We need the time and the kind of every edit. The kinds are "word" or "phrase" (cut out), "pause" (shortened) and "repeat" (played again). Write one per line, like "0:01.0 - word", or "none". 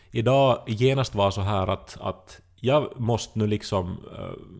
none